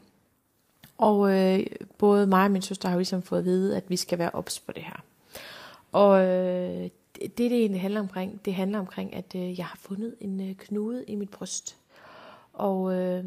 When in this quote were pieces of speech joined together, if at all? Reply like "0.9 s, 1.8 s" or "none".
none